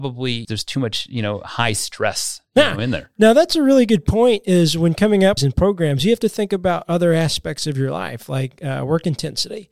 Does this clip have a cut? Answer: yes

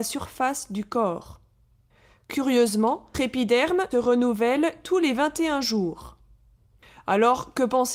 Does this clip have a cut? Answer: yes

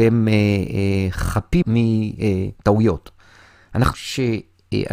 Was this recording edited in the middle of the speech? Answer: yes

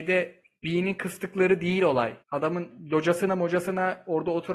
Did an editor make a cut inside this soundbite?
yes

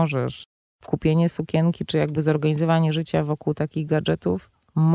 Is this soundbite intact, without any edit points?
yes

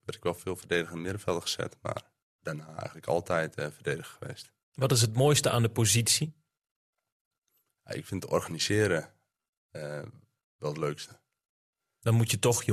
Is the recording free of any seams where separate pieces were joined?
yes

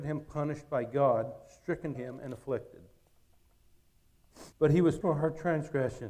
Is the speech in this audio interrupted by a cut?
yes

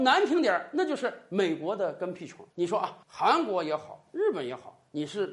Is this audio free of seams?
no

